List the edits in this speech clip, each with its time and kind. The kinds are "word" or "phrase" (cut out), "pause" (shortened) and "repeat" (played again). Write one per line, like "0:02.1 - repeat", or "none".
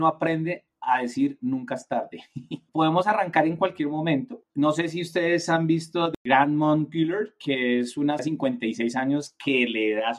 0:02.7 - word
0:08.2 - word